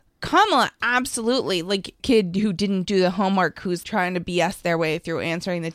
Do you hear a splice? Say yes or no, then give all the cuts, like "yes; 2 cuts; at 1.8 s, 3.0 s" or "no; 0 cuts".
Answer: yes; 2 cuts; at 2.0 s, 3.8 s